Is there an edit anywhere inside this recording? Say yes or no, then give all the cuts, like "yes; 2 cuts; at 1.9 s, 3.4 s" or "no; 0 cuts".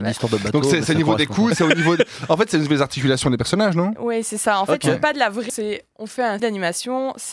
yes; 2 cuts; at 5.5 s, 6.4 s